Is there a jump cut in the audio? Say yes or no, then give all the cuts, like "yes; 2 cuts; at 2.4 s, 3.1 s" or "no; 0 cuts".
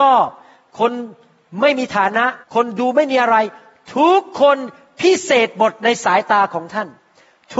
yes; 1 cut; at 2.4 s